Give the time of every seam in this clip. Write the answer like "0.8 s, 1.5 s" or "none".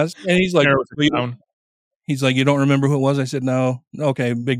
none